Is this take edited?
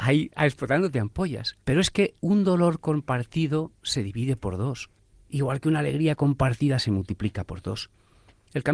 yes; 3 cuts; at 1.6 s, 2.2 s, 5.0 s

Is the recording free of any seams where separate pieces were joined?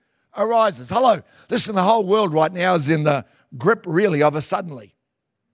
yes; 0 cuts

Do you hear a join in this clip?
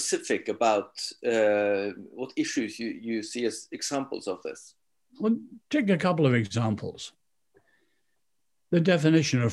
no; 0 cuts

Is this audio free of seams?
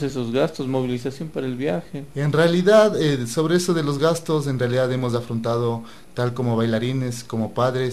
yes; 0 cuts

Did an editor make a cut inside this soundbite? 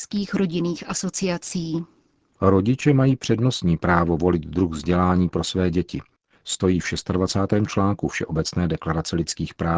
no; 0 cuts

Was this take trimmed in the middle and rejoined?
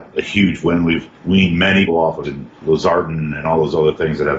yes; 4 cuts; at 1.1 s, 1.9 s, 2.2 s, 2.6 s

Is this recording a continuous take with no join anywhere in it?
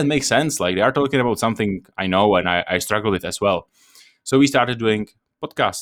yes; 0 cuts

